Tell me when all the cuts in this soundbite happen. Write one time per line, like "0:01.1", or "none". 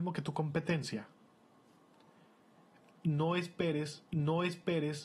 0:04.1